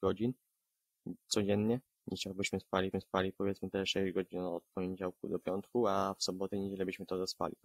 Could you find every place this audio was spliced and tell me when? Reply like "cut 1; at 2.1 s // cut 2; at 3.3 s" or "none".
cut 1; at 1.9 s // cut 2; at 2.9 s